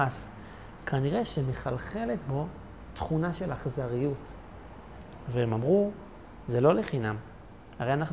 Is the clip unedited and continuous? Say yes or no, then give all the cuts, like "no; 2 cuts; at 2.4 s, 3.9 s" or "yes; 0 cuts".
yes; 0 cuts